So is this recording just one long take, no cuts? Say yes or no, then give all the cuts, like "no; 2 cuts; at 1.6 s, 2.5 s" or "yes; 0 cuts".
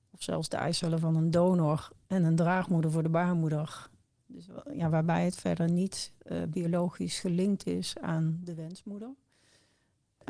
yes; 0 cuts